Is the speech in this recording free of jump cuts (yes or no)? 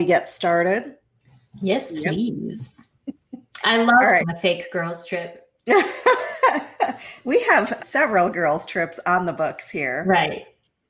no